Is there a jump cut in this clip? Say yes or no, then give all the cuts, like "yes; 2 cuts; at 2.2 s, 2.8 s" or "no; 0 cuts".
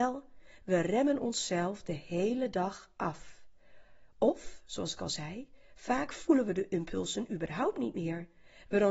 no; 0 cuts